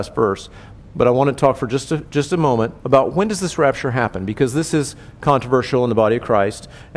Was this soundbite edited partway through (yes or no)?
yes